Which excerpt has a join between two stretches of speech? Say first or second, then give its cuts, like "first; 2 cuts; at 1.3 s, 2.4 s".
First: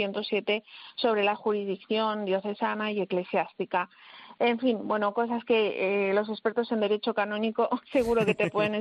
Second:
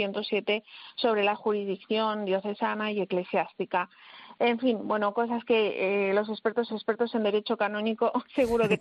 second; 1 cut; at 6.7 s